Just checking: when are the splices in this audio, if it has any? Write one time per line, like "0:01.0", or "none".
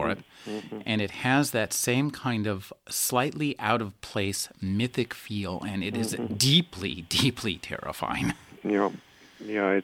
none